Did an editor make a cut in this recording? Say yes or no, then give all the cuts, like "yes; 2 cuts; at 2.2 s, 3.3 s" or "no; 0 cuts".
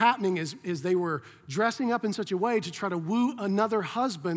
no; 0 cuts